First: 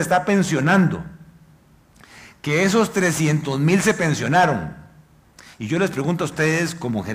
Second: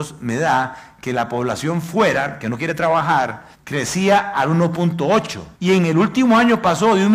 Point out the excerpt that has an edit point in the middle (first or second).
second